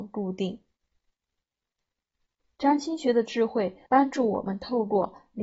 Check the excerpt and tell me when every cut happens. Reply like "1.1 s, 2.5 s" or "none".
3.9 s

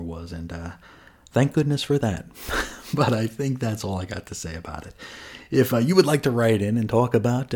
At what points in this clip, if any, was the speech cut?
none

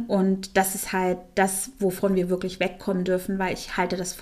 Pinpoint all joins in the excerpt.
none

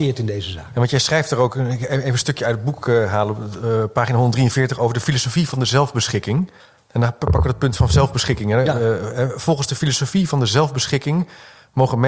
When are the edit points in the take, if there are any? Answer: 6.6 s

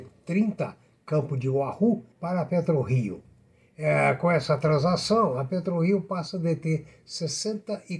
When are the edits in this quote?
2.1 s

